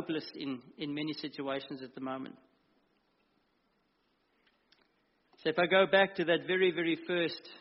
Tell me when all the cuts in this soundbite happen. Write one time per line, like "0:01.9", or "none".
none